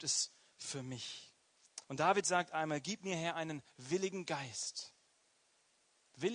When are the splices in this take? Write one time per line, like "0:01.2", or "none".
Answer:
0:01.8